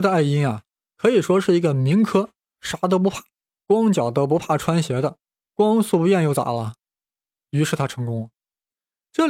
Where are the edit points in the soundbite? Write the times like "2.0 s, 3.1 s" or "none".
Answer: 3.5 s, 5.4 s